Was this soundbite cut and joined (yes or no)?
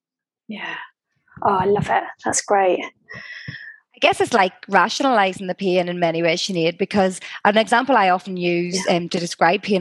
no